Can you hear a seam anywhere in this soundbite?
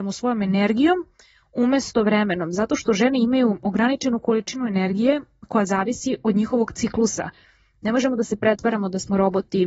no; 0 cuts

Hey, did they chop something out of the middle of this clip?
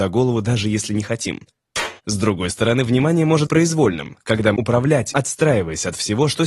yes; 4 cuts; at 2.0 s, 3.5 s, 4.6 s, 5.1 s

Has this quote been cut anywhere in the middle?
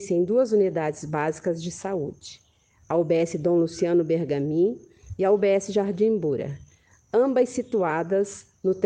no; 0 cuts

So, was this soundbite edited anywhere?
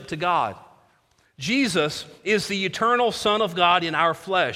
no; 0 cuts

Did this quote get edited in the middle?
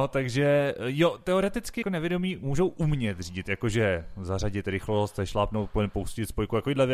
yes; 1 cut; at 1.8 s

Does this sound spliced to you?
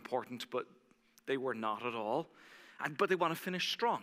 no; 0 cuts

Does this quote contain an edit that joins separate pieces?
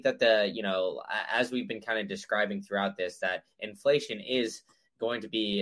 no; 0 cuts

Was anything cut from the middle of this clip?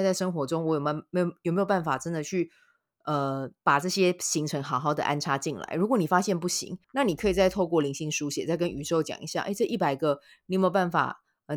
yes; 2 cuts; at 3.6 s, 6.8 s

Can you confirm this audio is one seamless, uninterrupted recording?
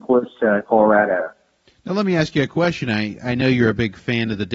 yes; 0 cuts

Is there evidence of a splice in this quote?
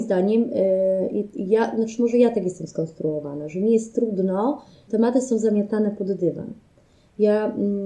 yes; 1 cut; at 4.9 s

